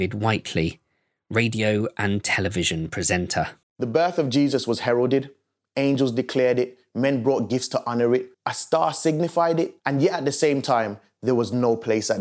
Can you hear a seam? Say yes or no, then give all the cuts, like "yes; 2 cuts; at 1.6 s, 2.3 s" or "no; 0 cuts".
yes; 3 cuts; at 3.6 s, 8.3 s, 9.8 s